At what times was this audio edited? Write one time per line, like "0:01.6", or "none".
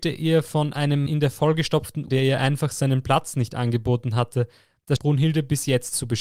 0:01.1
0:02.1
0:05.0